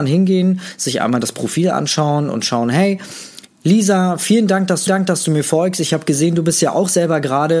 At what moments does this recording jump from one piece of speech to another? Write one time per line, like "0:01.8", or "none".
0:04.9